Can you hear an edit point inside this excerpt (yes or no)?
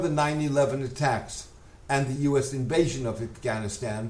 no